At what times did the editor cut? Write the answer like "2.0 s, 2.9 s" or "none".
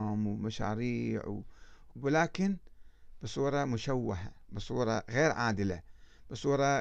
1.9 s